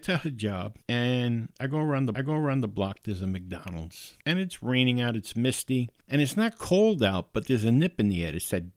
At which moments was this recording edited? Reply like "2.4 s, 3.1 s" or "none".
2.1 s